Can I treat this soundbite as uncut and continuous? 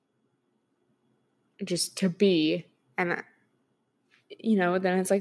yes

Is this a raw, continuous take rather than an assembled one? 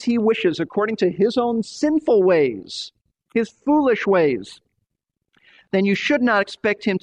yes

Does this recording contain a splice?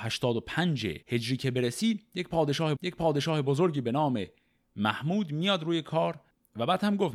yes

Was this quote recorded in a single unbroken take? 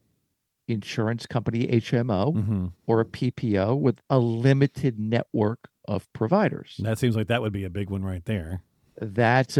no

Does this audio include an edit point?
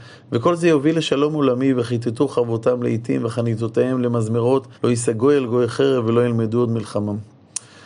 yes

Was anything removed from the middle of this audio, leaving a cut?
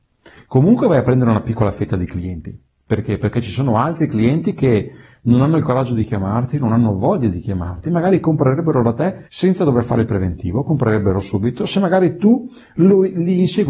yes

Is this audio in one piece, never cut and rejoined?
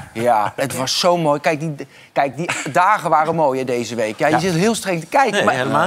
yes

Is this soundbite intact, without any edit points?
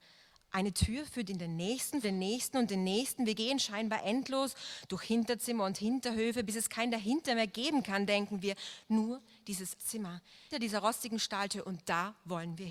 no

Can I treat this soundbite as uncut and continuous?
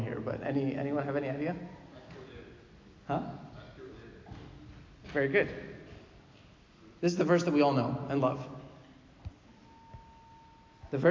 yes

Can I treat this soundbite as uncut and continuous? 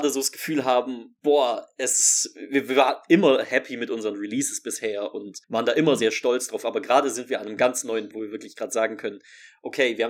no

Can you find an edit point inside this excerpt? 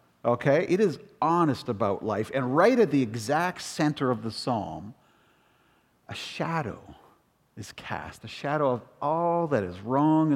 no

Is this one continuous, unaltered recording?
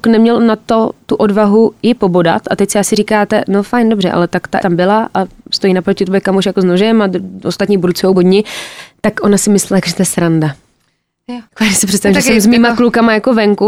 no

